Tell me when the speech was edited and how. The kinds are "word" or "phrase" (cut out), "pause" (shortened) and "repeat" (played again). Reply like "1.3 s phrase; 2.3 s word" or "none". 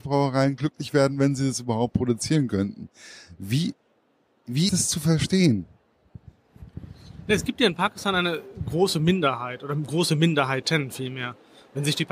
4.7 s word